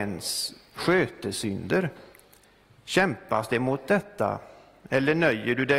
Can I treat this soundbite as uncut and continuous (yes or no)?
yes